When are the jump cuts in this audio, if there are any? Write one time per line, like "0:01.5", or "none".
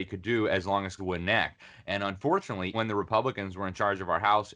0:01.0
0:02.7

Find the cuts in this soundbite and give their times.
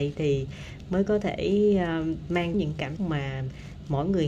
0:02.5
0:03.0

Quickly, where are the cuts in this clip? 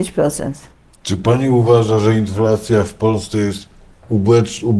none

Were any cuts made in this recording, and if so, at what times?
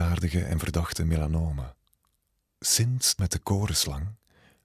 0:02.3
0:03.2

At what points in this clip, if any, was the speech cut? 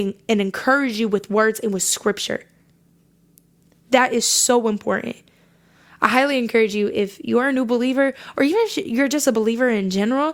none

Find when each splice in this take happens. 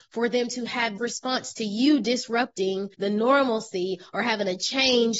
0:01.0
0:02.9

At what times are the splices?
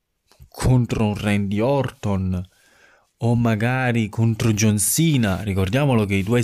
none

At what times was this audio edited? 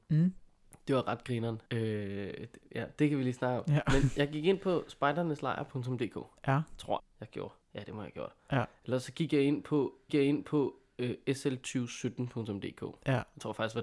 0:01.7
0:07.0
0:07.6
0:10.1

